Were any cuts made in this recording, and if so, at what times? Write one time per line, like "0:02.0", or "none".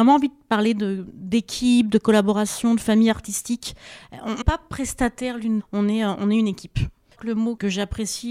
0:04.4
0:05.6
0:07.2